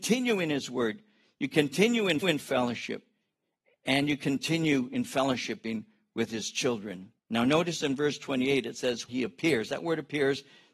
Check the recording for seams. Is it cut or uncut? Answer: cut